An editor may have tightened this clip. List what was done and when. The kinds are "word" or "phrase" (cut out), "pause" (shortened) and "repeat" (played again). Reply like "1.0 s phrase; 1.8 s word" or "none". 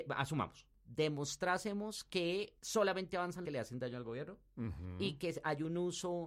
2.6 s pause; 3.5 s phrase